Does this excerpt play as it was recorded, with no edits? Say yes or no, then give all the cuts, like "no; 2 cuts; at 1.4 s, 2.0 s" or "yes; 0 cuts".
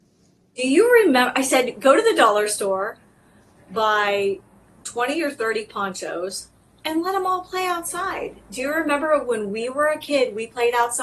yes; 0 cuts